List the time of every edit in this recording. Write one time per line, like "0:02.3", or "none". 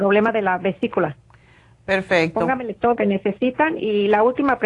0:03.0